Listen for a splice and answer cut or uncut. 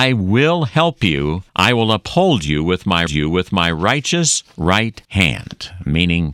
cut